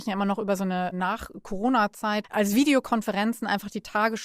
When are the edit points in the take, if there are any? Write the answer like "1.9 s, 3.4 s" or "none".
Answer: 2.2 s